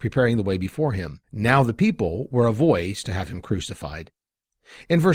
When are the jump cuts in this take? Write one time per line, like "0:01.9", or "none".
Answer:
0:01.2